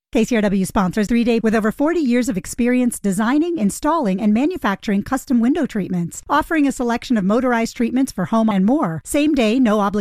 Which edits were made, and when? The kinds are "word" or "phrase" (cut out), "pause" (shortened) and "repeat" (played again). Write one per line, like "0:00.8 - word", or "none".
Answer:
0:01.1 - word
0:01.4 - word
0:08.5 - word